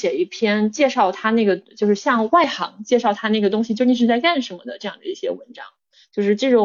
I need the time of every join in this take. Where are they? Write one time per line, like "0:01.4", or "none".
none